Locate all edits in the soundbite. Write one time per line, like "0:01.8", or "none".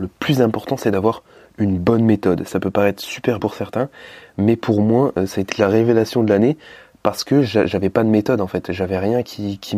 0:03.4
0:05.5